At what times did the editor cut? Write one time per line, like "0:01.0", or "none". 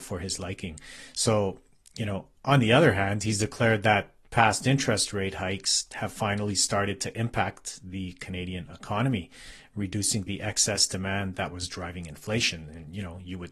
none